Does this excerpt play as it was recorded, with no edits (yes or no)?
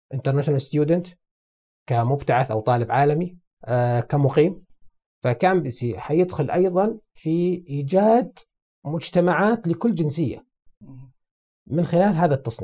yes